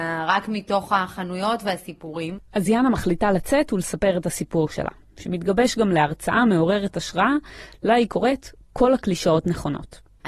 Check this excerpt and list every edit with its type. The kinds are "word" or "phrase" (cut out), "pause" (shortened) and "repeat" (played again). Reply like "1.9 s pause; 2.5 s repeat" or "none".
none